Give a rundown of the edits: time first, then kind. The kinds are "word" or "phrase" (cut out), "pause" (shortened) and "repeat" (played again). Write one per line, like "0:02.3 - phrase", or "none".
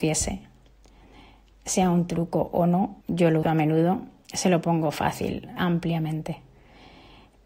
0:03.0 - pause
0:03.4 - word
0:05.6 - word